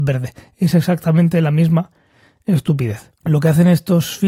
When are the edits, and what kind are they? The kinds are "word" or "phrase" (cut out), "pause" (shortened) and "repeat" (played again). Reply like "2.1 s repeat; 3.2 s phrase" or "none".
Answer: 3.1 s pause

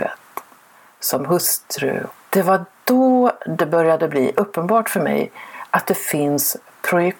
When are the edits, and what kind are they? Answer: none

